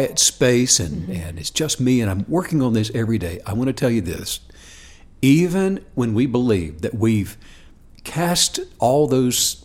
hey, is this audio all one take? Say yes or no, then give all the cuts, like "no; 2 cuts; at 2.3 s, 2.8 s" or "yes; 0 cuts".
yes; 0 cuts